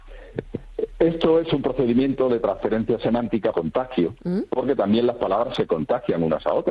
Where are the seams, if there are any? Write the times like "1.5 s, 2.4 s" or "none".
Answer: 3.5 s